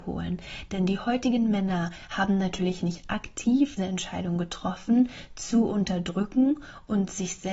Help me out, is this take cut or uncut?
cut